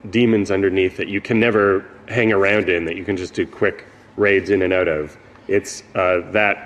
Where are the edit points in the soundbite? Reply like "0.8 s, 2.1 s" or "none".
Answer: none